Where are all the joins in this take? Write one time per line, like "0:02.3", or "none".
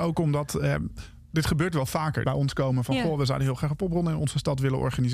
0:02.2